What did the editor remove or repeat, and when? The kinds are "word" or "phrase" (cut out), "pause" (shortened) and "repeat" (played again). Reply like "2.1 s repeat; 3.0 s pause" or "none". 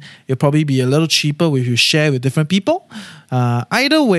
none